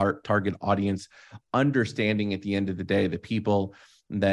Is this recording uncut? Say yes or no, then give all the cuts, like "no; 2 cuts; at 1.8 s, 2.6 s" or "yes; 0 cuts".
yes; 0 cuts